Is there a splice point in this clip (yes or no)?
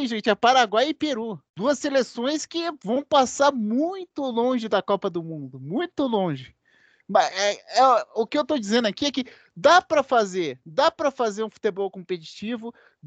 yes